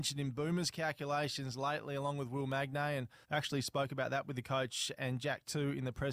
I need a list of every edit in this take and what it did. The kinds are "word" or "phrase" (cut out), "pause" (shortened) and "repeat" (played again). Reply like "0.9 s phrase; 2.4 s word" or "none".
3.2 s pause